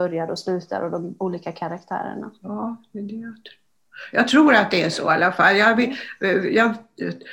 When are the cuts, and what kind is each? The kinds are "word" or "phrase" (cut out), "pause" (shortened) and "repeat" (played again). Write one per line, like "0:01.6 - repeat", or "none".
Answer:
none